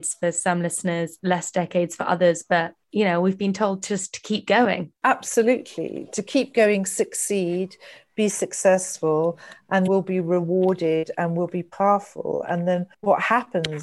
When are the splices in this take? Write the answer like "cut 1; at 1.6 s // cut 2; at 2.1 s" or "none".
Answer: cut 1; at 2.8 s // cut 2; at 5.0 s // cut 3; at 9.9 s // cut 4; at 12.9 s

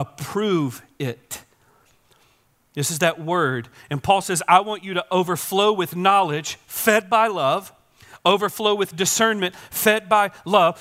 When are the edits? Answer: none

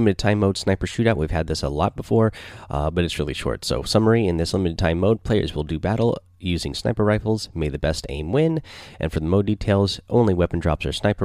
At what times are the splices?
none

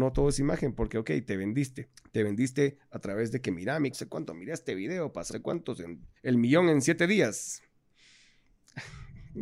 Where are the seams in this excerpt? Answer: cut 1; at 2.0 s // cut 2; at 3.9 s // cut 3; at 5.3 s // cut 4; at 6.2 s

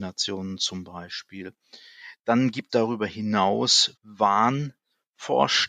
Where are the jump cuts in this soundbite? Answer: cut 1; at 2.7 s // cut 2; at 3.9 s

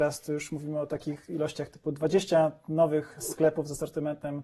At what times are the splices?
none

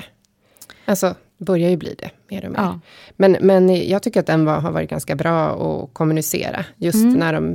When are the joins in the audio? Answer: none

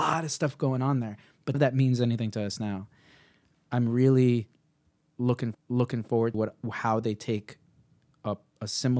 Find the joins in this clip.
cut 1; at 1.5 s // cut 2; at 5.5 s // cut 3; at 6.3 s

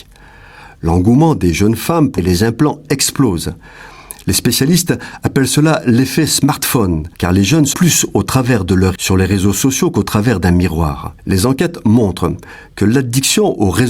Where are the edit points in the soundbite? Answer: cut 1; at 2.2 s // cut 2; at 7.1 s // cut 3; at 7.7 s // cut 4; at 9.0 s // cut 5; at 11.2 s

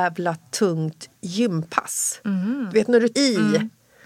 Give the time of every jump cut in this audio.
cut 1; at 3.1 s

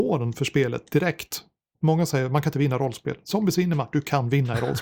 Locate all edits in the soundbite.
none

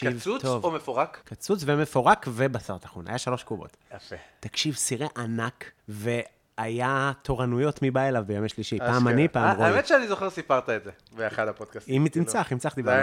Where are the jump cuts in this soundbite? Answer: cut 1; at 1.2 s // cut 2; at 5.8 s

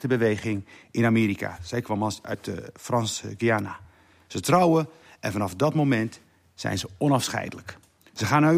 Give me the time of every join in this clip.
none

